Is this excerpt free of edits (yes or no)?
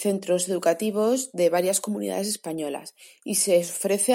yes